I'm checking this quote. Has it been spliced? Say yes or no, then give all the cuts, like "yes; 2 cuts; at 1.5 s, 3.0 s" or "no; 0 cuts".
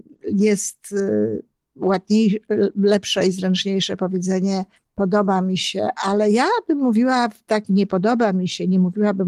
yes; 2 cuts; at 4.7 s, 7.7 s